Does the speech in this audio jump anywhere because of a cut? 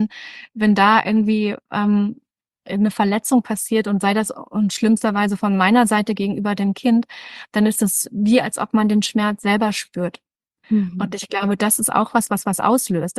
no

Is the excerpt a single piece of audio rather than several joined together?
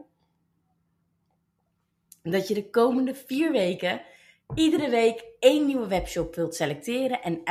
yes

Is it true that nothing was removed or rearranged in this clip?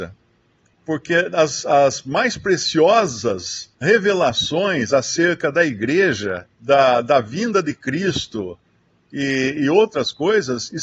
no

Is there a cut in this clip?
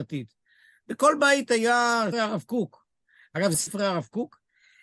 yes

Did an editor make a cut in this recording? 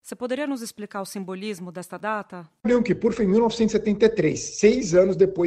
yes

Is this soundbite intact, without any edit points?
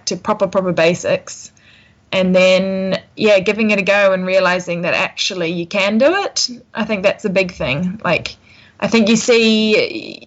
yes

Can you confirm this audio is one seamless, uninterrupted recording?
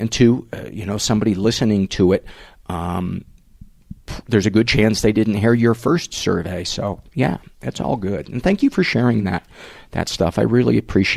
yes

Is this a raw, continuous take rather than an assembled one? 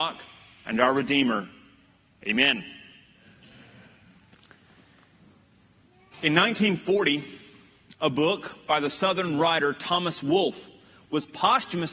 yes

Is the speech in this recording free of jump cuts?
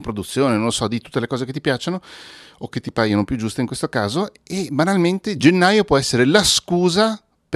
yes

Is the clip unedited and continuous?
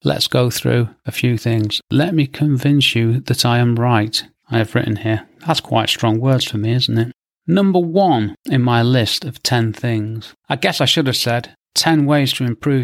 yes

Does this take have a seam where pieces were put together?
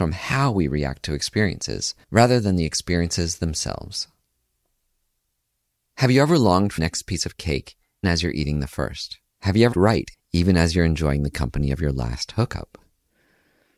yes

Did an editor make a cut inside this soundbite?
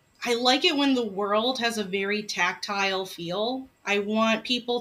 yes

